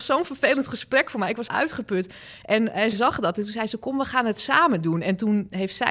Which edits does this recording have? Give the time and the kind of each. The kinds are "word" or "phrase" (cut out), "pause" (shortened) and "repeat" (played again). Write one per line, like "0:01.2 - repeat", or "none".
0:01.5 - word
0:02.9 - word